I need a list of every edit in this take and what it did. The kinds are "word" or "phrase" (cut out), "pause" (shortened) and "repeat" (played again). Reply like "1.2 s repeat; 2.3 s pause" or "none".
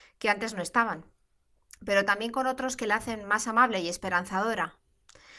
none